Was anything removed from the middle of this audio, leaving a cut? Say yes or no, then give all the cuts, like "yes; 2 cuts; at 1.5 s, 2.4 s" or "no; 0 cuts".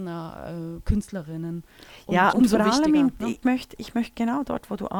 yes; 2 cuts; at 2.3 s, 3.4 s